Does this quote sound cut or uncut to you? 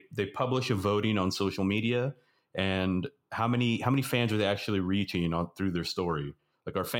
uncut